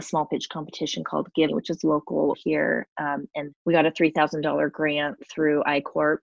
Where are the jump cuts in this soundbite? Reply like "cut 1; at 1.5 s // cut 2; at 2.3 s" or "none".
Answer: cut 1; at 1.5 s // cut 2; at 2.3 s // cut 3; at 3.5 s